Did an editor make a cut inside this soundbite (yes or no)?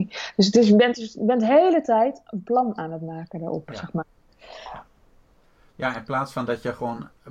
no